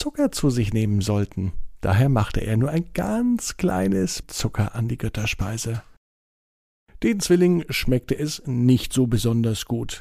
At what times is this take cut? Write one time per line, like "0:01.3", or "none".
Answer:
0:04.2